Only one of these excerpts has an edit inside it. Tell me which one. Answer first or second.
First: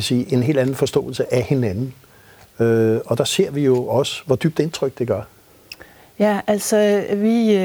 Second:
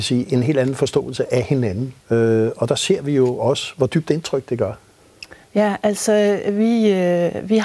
second